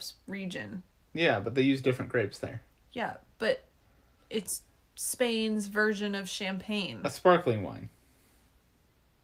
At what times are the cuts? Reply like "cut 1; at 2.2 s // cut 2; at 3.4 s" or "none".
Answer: none